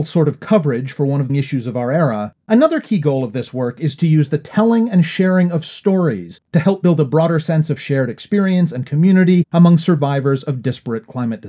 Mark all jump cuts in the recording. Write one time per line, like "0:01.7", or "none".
0:01.3